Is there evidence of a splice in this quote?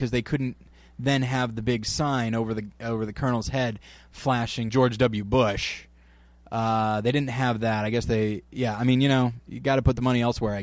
yes; 1 cut; at 4.7 s

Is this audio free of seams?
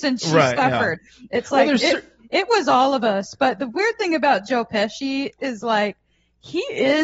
yes; 0 cuts

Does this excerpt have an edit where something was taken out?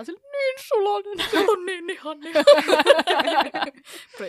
yes; 1 cut; at 1.4 s

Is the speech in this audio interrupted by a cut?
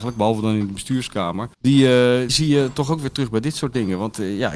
yes; 2 cuts; at 1.5 s, 2.3 s

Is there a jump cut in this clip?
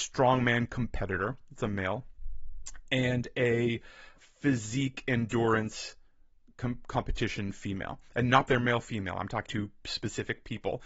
yes; 3 cuts; at 4.2 s, 8.5 s, 9.5 s

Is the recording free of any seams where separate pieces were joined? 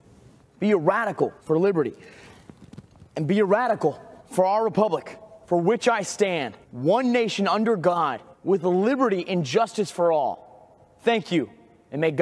no; 6 cuts; at 1.4 s, 3.1 s, 4.2 s, 5.4 s, 6.6 s, 8.3 s

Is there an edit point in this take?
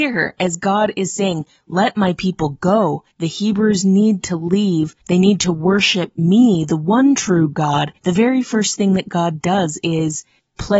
yes; 3 cuts; at 3.1 s, 5.0 s, 8.0 s

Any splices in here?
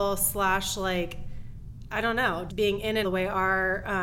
yes; 2 cuts; at 2.5 s, 3.0 s

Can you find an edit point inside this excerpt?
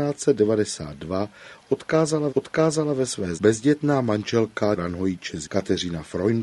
yes; 4 cuts; at 2.3 s, 3.4 s, 4.8 s, 5.4 s

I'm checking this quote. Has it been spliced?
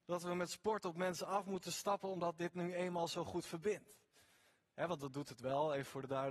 no; 0 cuts

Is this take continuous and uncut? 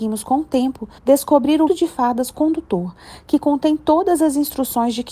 no; 2 cuts; at 1.0 s, 1.7 s

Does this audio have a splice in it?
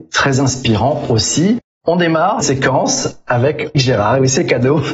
yes; 2 cuts; at 2.4 s, 3.7 s

